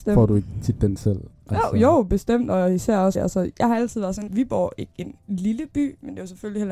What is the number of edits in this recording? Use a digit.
3